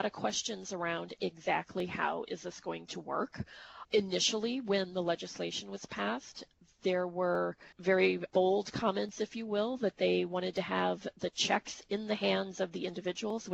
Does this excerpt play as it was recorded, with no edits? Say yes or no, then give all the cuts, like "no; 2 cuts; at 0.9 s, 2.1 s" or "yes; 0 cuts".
no; 1 cut; at 7.7 s